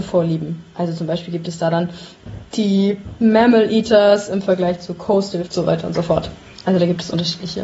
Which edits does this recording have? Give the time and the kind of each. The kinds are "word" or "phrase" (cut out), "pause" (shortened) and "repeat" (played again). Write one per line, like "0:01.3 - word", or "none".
0:02.5 - pause
0:05.5 - phrase